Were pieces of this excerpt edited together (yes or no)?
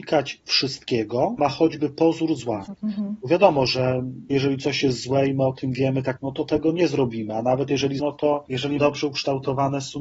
yes